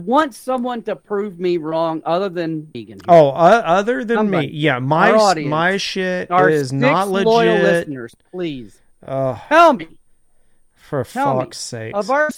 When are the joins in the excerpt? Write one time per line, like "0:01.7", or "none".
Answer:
0:02.7